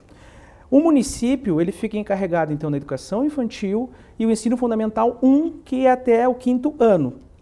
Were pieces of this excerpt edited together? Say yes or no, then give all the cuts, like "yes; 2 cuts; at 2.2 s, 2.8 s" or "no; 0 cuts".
no; 0 cuts